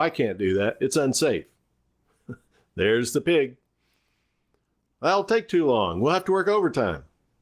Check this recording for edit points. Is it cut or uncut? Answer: uncut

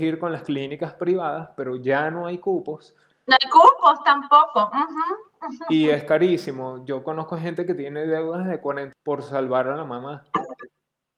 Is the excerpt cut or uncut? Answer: cut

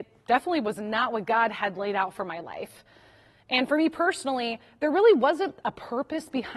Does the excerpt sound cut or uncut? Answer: uncut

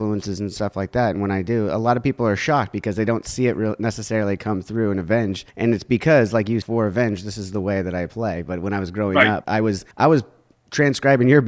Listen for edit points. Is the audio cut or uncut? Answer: cut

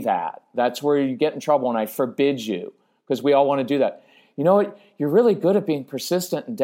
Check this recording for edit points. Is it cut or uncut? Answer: uncut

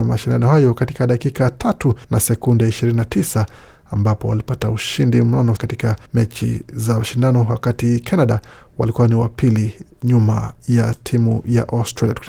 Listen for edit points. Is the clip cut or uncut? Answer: cut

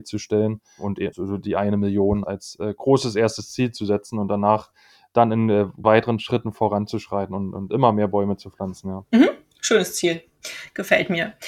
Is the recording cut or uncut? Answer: cut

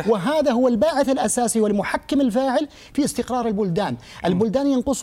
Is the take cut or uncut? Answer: uncut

